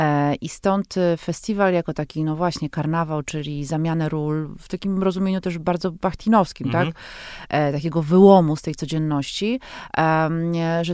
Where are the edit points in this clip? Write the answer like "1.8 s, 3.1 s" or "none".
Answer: none

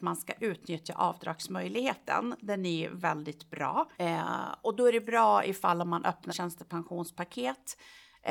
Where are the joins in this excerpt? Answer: 3.9 s, 6.3 s

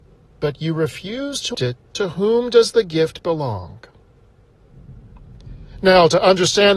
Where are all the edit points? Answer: 1.5 s, 1.9 s

